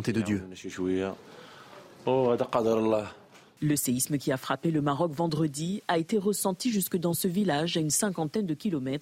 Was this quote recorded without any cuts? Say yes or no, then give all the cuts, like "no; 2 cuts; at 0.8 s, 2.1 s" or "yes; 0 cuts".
yes; 0 cuts